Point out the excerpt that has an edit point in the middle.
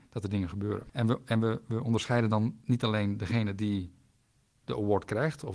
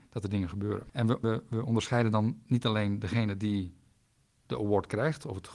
second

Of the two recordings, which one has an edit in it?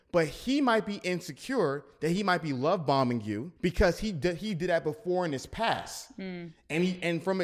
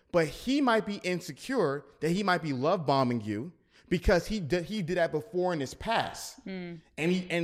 first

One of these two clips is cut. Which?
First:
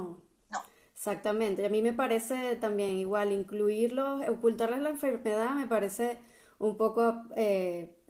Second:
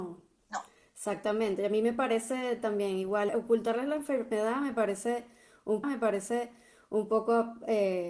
second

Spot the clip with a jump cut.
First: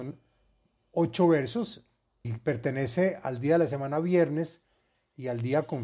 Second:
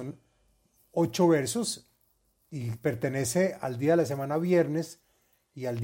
first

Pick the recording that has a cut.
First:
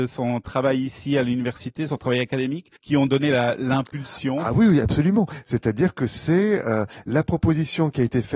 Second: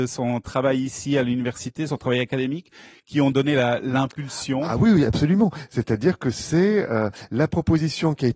first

